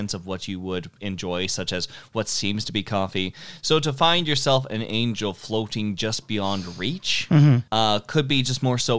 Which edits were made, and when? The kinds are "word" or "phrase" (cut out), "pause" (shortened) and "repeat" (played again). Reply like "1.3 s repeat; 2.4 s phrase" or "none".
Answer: 7.7 s pause